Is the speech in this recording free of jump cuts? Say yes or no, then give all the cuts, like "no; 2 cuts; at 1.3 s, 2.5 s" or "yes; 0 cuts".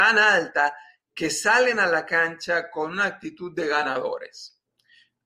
yes; 0 cuts